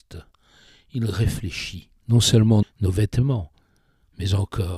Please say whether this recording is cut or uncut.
cut